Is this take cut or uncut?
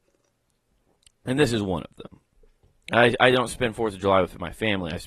uncut